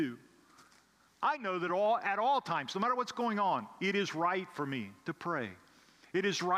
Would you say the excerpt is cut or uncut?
uncut